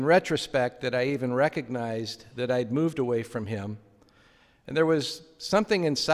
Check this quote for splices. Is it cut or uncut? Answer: uncut